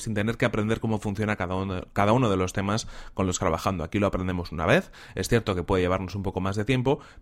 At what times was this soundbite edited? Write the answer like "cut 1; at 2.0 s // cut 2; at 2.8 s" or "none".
cut 1; at 3.4 s

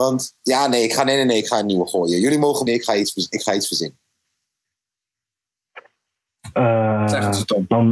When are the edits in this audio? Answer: cut 1; at 2.7 s

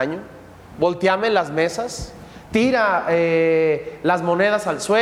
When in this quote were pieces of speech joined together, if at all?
none

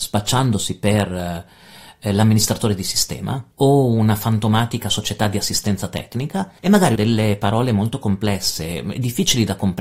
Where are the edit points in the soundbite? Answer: cut 1; at 3.5 s // cut 2; at 6.6 s // cut 3; at 7.0 s

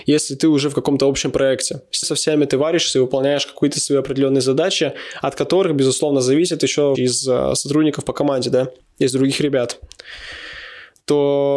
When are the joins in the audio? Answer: cut 1; at 2.0 s // cut 2; at 6.9 s // cut 3; at 8.8 s

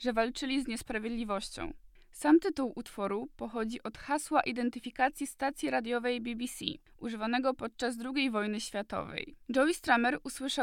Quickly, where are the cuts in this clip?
cut 1; at 9.4 s

